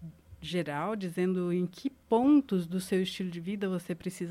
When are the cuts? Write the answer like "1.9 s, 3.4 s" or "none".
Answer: none